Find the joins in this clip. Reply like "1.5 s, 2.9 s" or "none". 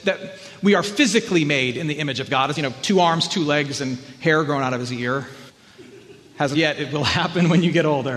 2.6 s, 5.5 s, 6.5 s